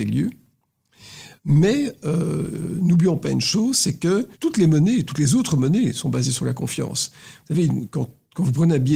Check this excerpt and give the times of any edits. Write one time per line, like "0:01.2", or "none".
0:01.4
0:04.3